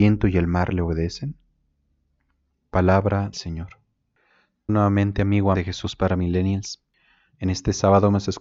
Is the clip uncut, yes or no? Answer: no